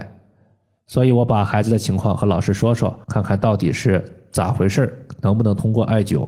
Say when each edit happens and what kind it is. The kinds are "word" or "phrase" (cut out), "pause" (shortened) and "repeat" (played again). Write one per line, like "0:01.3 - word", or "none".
0:03.0 - pause